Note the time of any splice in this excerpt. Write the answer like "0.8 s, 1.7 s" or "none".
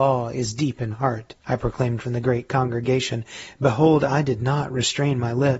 0.9 s, 1.4 s, 2.0 s